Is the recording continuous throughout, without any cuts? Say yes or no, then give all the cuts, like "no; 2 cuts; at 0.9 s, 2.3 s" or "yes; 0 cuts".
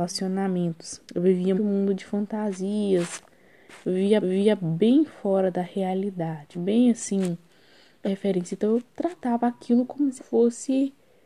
no; 6 cuts; at 1.0 s, 1.6 s, 4.2 s, 6.5 s, 8.0 s, 10.2 s